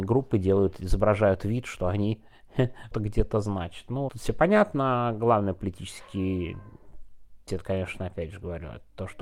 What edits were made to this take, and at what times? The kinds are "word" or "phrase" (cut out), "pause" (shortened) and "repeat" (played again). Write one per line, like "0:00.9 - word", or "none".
0:02.9 - word
0:04.1 - word
0:07.5 - word